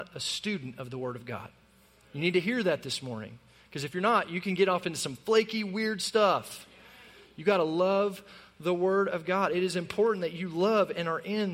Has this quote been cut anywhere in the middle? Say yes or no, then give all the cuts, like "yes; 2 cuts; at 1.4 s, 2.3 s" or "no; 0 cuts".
no; 0 cuts